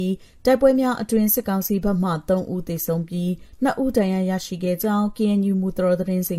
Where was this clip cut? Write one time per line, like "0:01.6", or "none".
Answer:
none